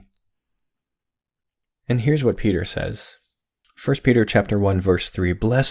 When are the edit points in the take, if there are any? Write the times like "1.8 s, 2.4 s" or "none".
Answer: none